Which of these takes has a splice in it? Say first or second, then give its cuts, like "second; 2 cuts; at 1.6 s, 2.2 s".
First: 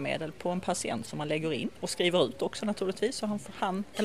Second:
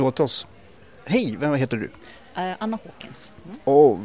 first; 1 cut; at 1.8 s